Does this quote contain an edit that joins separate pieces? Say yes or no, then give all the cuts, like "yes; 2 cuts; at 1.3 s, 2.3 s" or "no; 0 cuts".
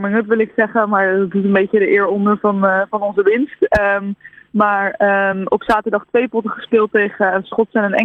no; 0 cuts